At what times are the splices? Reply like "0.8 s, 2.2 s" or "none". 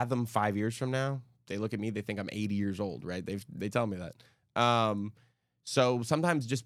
none